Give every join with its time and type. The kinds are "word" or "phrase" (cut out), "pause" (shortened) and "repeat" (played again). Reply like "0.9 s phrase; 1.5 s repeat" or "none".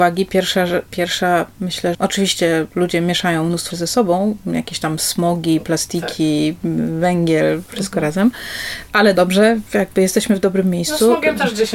1.9 s word; 3.7 s word; 9.2 s word